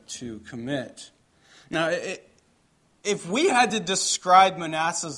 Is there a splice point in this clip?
no; 0 cuts

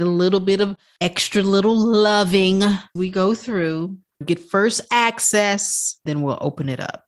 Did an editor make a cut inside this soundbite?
yes; 3 cuts; at 3.0 s, 4.2 s, 6.1 s

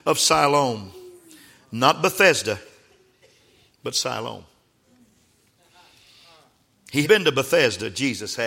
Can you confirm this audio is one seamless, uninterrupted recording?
no; 1 cut; at 7.0 s

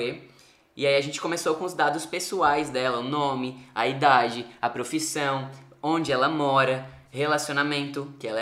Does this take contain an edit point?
no; 0 cuts

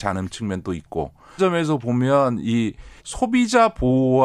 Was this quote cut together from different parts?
yes; 2 cuts; at 1.4 s, 3.0 s

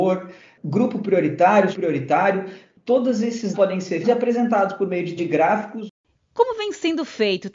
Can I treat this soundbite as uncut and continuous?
no; 4 cuts; at 1.7 s, 3.5 s, 4.0 s, 5.2 s

